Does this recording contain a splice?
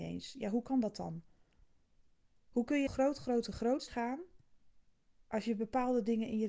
yes; 2 cuts; at 2.9 s, 3.9 s

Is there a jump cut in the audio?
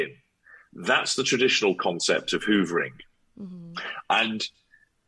no; 0 cuts

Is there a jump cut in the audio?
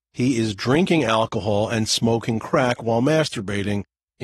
no; 0 cuts

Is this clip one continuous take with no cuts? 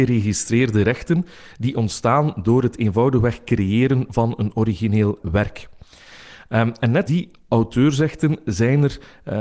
no; 2 cuts; at 5.2 s, 7.1 s

